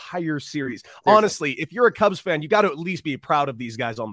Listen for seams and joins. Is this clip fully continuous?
yes; 0 cuts

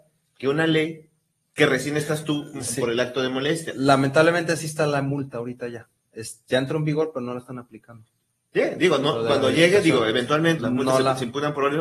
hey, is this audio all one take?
no; 1 cut; at 10.6 s

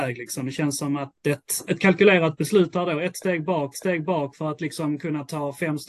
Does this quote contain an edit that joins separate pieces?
yes; 3 cuts; at 1.1 s, 1.7 s, 3.7 s

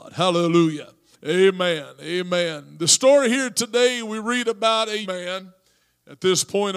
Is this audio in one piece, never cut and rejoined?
no; 2 cuts; at 1.1 s, 5.0 s

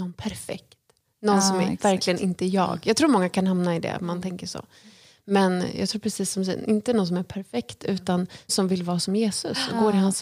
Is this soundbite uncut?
no; 1 cut; at 8.5 s

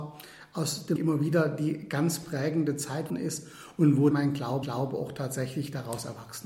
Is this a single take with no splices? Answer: no; 4 cuts; at 1.0 s, 3.1 s, 4.1 s, 4.6 s

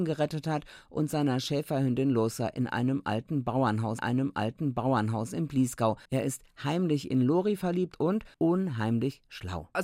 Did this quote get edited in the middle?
yes; 3 cuts; at 4.0 s, 6.1 s, 8.3 s

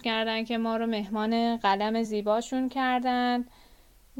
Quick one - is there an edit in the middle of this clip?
no; 0 cuts

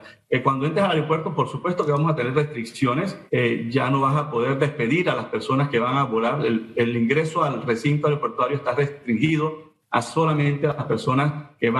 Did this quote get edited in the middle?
yes; 1 cut; at 3.3 s

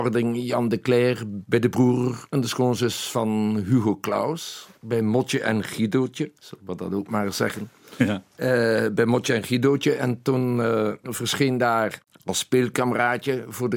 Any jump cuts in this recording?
yes; 1 cut; at 6.4 s

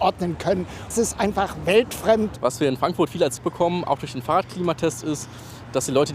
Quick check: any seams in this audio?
yes; 2 cuts; at 0.9 s, 3.4 s

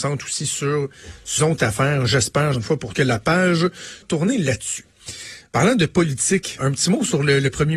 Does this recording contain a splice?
yes; 5 cuts; at 1.4 s, 2.5 s, 2.9 s, 4.0 s, 6.6 s

